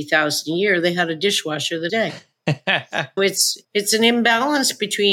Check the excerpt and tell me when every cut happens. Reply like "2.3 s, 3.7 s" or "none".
1.9 s, 3.2 s, 3.6 s

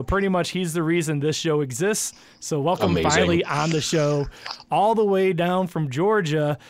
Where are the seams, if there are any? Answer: none

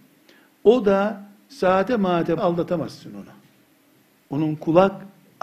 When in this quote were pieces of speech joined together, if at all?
1.5 s, 2.4 s

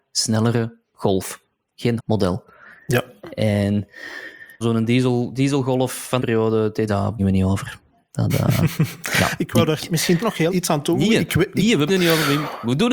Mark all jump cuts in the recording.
2.0 s, 4.6 s, 6.2 s, 6.9 s, 7.2 s, 10.2 s, 10.5 s, 11.9 s

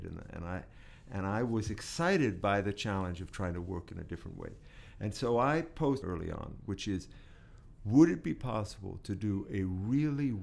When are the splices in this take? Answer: 6.0 s

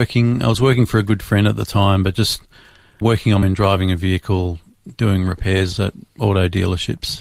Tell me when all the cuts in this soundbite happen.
3.0 s, 3.4 s, 5.7 s

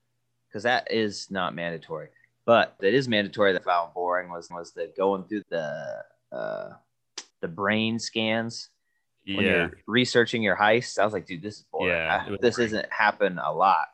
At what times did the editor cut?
2.8 s, 3.6 s, 4.5 s, 5.4 s, 7.3 s, 12.4 s

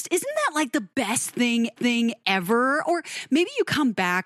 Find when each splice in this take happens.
1.8 s

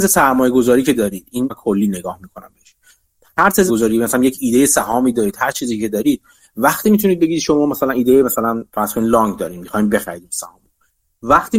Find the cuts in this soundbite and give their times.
1.5 s, 3.7 s, 8.7 s

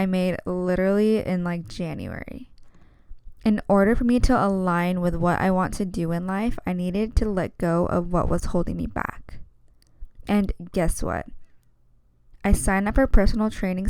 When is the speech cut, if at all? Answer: none

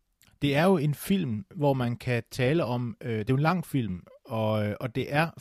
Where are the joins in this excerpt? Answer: none

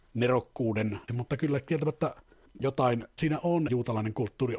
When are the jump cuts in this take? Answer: 1.1 s, 3.2 s, 3.7 s

